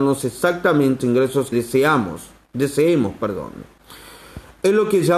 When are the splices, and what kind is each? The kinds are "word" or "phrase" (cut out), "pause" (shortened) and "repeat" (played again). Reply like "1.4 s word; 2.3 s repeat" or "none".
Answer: 1.0 s word; 1.5 s word